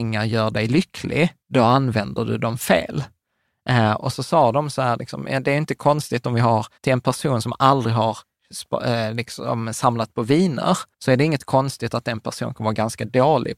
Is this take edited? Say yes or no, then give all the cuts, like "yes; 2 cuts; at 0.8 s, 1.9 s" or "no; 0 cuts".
yes; 3 cuts; at 1.4 s, 6.8 s, 10.9 s